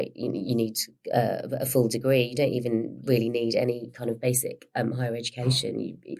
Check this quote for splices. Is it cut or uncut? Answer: uncut